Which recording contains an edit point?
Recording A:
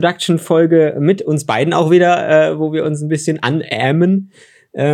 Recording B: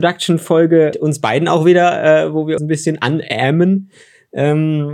B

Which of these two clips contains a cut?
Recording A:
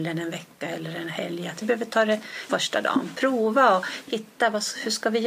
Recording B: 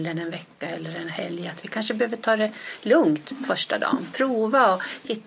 A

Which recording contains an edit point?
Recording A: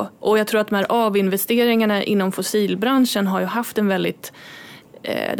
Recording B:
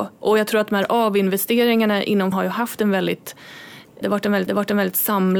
B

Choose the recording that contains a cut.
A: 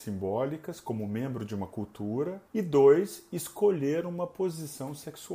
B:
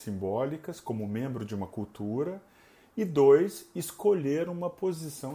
A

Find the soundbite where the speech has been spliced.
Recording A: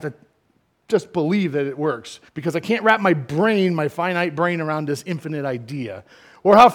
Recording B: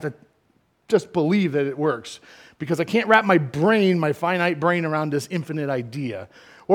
A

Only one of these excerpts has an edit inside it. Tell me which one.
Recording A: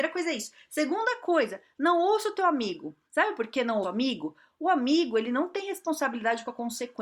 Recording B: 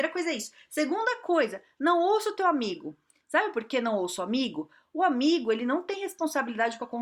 A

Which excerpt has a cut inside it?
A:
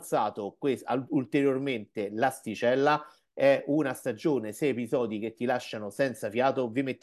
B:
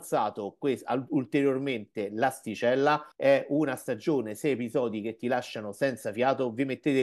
B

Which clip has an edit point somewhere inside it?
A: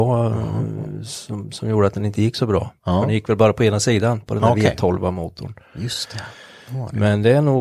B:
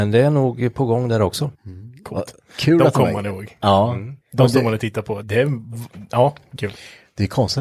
B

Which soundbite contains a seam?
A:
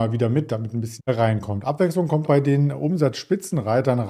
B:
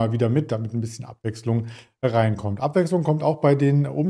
A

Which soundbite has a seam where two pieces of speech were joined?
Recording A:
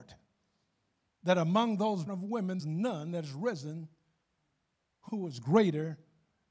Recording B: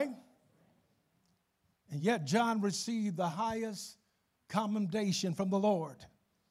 A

